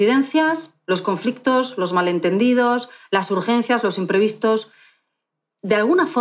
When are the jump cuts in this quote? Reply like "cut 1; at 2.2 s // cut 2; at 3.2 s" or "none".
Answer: none